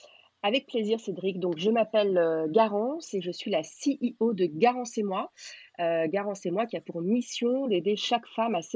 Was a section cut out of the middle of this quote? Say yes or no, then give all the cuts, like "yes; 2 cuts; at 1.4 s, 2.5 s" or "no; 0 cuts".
no; 0 cuts